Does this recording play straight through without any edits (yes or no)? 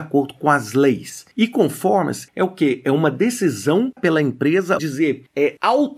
no